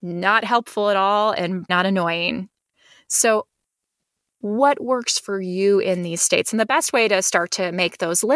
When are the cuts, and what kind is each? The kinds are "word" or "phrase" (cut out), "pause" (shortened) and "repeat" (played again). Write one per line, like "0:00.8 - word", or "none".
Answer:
0:01.7 - word